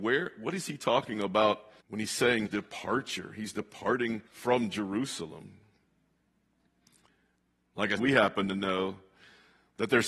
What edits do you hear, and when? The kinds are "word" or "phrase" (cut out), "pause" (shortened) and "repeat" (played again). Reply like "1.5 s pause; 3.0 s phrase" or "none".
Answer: 1.8 s pause; 2.5 s word; 4.3 s pause; 8.0 s word